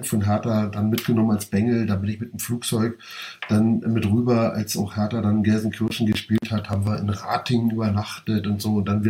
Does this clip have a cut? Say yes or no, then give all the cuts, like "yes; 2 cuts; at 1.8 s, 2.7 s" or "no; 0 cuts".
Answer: no; 0 cuts